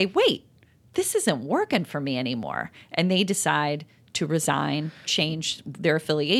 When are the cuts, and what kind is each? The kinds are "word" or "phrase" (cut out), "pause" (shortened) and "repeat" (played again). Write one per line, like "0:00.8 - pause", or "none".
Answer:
0:05.0 - word